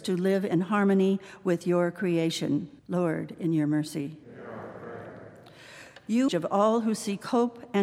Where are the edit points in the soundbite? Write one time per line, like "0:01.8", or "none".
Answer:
0:02.8
0:04.2
0:06.3